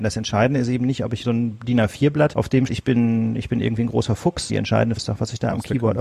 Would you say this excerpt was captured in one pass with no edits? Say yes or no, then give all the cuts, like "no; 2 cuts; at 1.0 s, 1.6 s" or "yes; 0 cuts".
no; 5 cuts; at 1.2 s, 2.3 s, 2.7 s, 4.5 s, 5.0 s